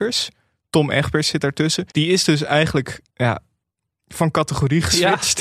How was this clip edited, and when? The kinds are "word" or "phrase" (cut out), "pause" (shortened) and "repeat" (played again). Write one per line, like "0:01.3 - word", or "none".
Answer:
0:01.9 - pause
0:03.1 - pause